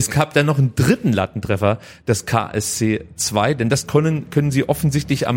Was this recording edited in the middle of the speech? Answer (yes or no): no